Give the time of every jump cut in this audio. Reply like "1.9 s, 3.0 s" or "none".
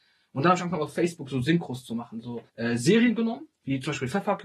2.5 s